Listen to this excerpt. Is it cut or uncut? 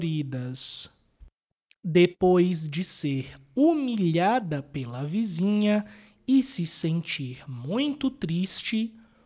uncut